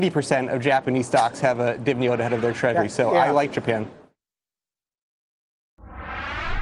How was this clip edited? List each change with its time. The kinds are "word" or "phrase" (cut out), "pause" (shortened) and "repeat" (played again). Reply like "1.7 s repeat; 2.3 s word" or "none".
none